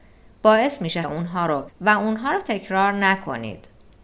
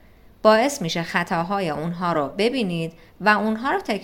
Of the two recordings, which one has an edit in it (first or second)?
first